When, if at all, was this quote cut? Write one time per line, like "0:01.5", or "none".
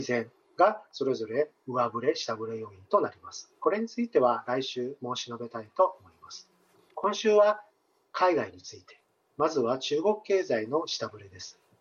none